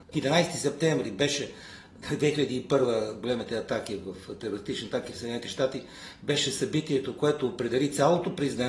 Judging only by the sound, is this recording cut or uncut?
uncut